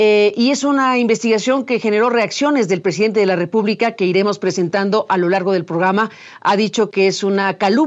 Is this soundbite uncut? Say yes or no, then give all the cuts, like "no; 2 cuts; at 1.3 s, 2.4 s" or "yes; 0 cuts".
yes; 0 cuts